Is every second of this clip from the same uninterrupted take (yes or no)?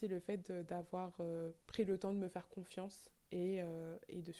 no